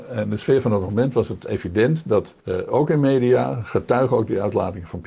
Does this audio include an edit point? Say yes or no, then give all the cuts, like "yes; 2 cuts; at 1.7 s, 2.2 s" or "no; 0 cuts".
yes; 1 cut; at 2.4 s